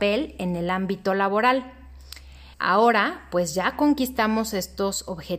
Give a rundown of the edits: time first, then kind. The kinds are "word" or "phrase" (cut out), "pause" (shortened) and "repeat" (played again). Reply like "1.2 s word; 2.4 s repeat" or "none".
2.5 s pause